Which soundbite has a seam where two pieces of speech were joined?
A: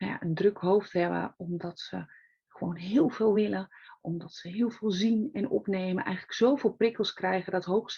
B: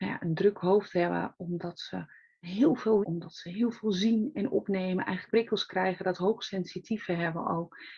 B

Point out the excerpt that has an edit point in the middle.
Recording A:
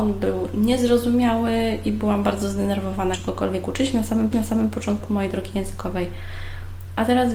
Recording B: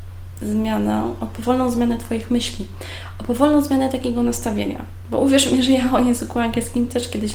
A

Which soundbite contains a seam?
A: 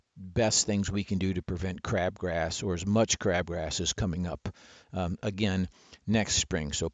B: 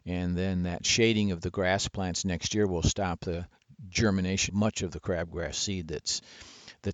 B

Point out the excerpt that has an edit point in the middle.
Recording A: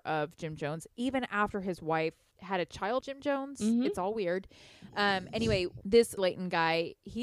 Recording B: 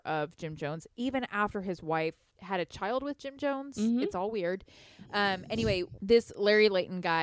A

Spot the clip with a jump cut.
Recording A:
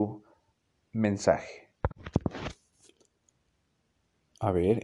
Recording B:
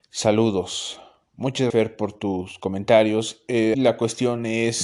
B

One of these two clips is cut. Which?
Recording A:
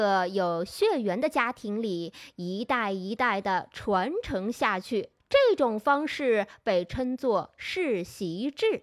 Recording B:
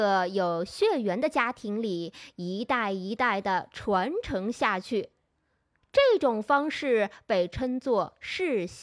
A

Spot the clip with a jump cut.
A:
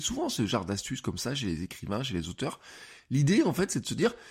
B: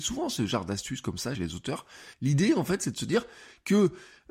B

